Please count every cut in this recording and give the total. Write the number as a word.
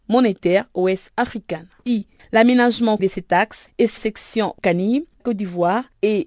four